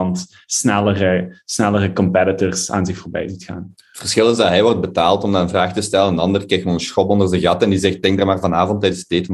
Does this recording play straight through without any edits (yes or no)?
yes